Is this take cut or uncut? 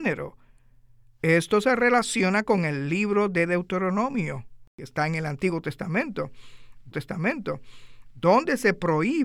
cut